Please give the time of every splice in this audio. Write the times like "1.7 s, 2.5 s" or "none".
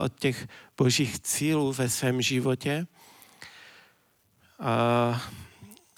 none